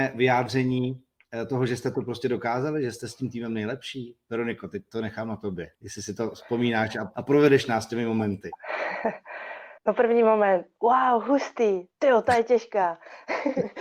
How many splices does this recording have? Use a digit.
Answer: 2